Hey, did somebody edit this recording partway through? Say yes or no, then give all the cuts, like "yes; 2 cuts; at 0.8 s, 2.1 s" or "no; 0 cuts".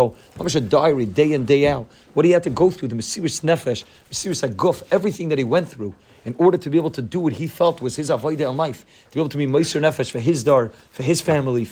no; 0 cuts